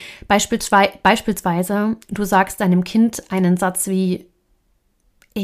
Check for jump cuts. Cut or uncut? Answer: uncut